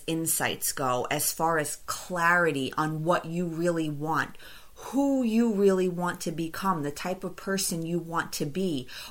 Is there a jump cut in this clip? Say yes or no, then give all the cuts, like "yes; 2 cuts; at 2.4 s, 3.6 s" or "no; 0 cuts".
no; 0 cuts